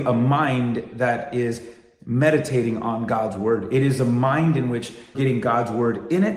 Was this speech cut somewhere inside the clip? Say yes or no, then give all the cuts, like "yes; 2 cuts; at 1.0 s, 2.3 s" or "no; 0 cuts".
yes; 1 cut; at 5.1 s